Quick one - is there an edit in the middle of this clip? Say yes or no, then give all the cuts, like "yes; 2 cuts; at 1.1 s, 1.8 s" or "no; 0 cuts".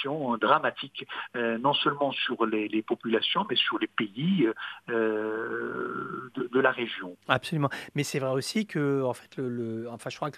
yes; 1 cut; at 7.2 s